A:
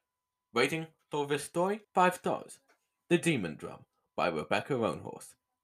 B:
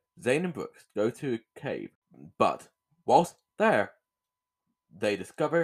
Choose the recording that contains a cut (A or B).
A